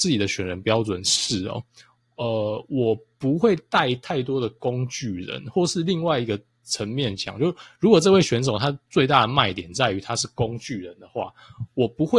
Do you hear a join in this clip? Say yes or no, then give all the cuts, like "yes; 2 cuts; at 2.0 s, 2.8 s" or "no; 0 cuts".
no; 0 cuts